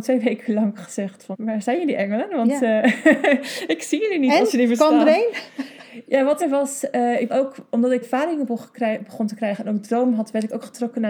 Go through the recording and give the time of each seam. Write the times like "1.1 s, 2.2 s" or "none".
1.3 s, 6.4 s, 7.3 s, 8.0 s

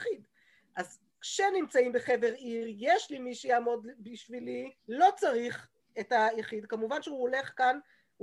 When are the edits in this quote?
4.8 s, 5.8 s

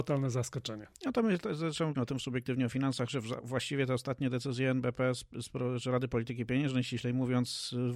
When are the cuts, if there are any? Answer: 1.9 s

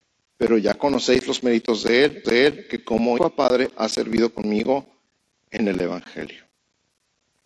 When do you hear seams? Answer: 2.2 s, 3.2 s

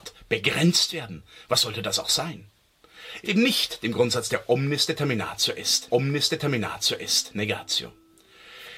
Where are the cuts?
3.2 s, 5.9 s

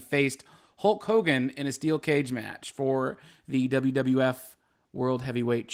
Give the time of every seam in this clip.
none

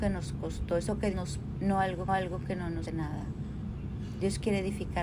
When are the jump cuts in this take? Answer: 1.1 s, 1.5 s, 2.1 s, 2.8 s

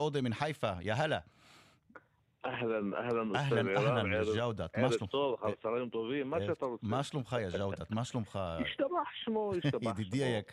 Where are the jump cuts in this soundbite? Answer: none

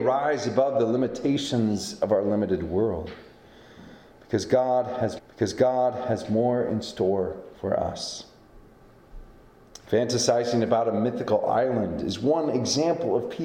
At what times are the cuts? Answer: 5.2 s

